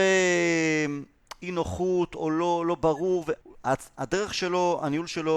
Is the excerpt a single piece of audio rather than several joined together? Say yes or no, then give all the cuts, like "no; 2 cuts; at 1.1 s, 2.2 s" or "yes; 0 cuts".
no; 1 cut; at 3.4 s